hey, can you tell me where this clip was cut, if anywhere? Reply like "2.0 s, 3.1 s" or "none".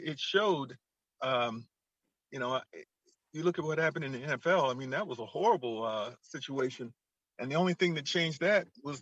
none